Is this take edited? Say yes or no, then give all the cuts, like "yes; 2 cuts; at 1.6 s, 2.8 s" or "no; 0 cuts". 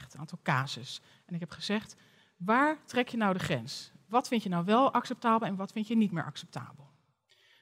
no; 0 cuts